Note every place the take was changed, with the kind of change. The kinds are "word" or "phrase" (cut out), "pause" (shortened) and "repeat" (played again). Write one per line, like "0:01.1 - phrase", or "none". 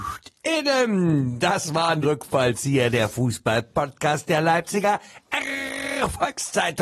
0:02.0 - word